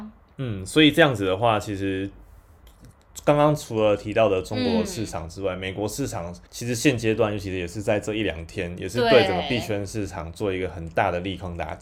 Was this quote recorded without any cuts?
no; 1 cut; at 6.5 s

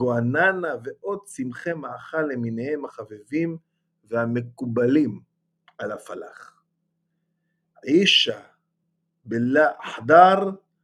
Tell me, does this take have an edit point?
no; 0 cuts

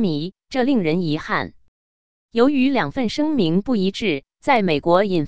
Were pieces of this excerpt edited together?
no; 0 cuts

